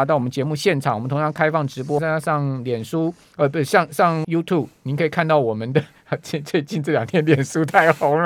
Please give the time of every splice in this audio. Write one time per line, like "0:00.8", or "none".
0:02.0
0:04.2